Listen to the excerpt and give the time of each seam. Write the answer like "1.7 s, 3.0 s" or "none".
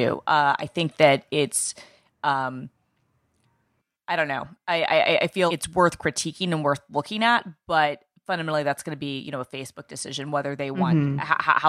5.5 s